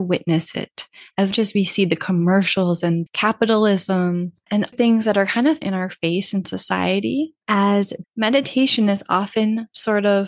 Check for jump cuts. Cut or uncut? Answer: cut